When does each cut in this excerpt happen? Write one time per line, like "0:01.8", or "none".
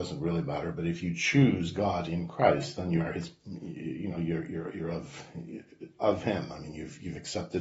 none